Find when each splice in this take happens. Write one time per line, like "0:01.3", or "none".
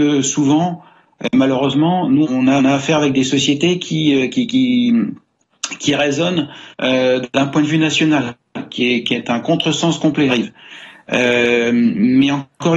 0:02.2
0:02.6
0:06.7
0:10.3